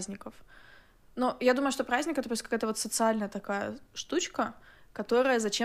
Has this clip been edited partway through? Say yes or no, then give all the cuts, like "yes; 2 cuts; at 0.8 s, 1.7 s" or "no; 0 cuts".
no; 0 cuts